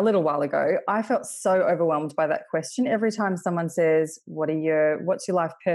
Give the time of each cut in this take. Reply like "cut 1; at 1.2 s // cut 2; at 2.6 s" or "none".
none